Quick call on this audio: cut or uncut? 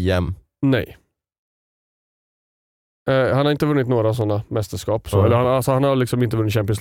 uncut